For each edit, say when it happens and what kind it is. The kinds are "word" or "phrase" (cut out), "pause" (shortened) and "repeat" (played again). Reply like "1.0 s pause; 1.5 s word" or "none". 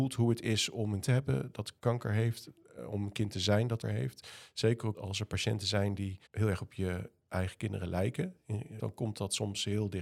1.0 s word; 1.8 s pause; 3.8 s word; 4.9 s word; 6.3 s pause; 8.8 s phrase